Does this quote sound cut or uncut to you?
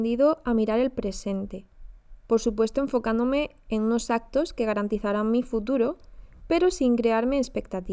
uncut